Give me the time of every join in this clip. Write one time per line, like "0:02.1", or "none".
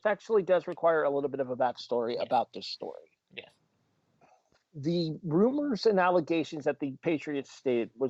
none